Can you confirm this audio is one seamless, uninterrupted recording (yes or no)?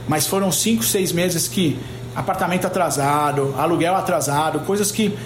yes